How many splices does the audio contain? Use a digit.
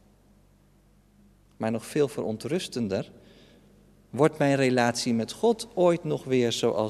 0